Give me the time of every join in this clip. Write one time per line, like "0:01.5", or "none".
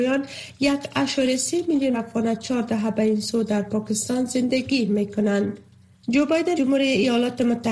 0:01.9
0:06.6